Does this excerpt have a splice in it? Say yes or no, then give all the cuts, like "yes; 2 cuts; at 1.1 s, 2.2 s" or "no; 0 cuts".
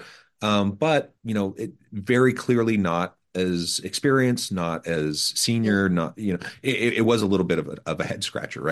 yes; 1 cut; at 1.2 s